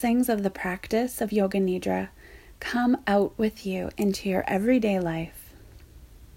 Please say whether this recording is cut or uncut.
uncut